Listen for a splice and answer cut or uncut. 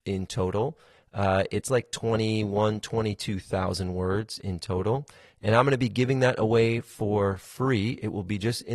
uncut